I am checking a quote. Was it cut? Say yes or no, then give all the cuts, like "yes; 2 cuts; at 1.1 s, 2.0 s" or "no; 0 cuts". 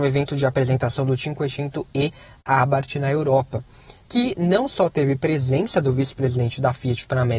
no; 0 cuts